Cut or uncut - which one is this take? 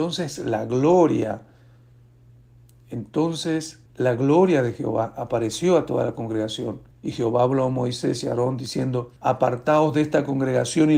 cut